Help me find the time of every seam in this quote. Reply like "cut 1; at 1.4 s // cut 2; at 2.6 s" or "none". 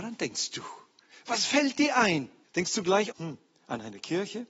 cut 1; at 2.4 s // cut 2; at 3.1 s